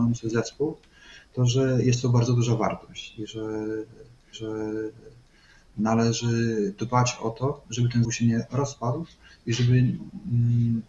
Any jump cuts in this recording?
yes; 2 cuts; at 4.3 s, 8.0 s

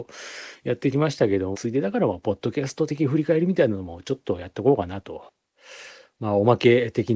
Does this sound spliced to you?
yes; 1 cut; at 1.5 s

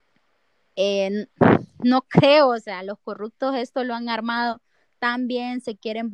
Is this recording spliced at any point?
no; 0 cuts

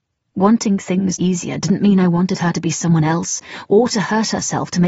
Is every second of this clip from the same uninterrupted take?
no; 1 cut; at 1.2 s

